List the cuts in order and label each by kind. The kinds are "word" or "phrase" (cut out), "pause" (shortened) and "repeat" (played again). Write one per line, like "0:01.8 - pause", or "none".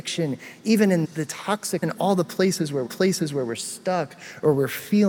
0:01.0 - word
0:01.8 - phrase
0:02.9 - repeat